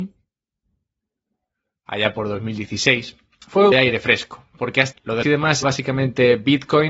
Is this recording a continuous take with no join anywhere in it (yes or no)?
no